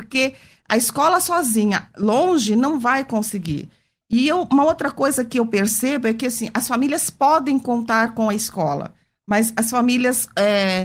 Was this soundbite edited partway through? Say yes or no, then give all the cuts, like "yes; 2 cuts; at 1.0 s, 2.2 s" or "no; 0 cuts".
no; 0 cuts